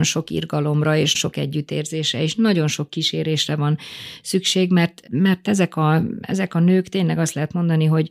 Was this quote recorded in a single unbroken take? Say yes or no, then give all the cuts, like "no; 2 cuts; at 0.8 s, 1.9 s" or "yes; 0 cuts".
no; 2 cuts; at 1.1 s, 5.1 s